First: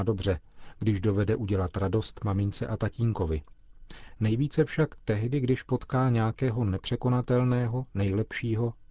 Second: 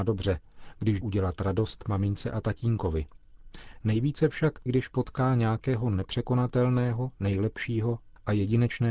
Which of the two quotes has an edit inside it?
second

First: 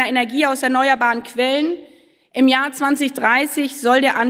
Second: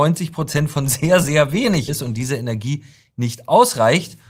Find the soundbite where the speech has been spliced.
second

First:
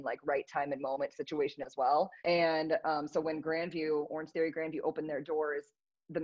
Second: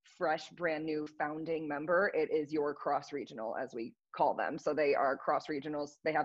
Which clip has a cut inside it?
first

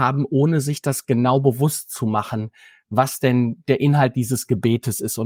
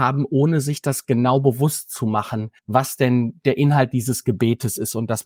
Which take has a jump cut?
second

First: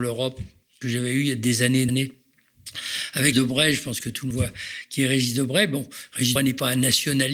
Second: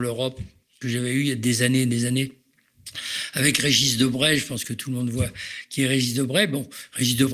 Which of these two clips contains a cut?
first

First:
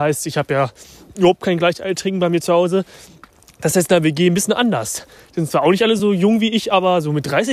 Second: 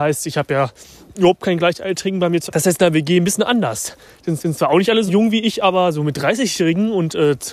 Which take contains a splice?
second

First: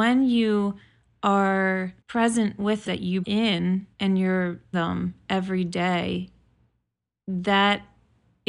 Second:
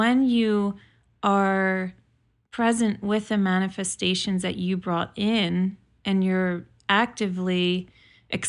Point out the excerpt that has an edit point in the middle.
first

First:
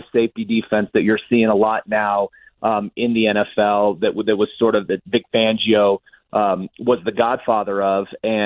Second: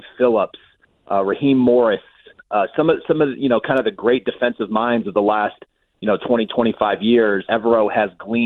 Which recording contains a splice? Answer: second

